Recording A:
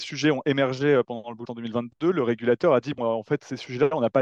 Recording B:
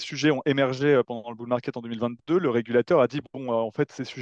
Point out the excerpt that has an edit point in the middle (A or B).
A